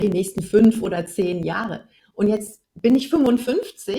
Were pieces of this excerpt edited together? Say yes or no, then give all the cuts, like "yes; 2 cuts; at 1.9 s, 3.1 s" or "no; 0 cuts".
yes; 1 cut; at 2.6 s